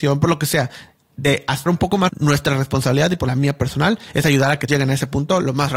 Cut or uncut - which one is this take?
cut